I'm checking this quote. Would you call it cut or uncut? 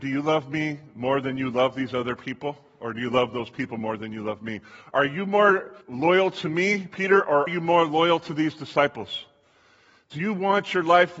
cut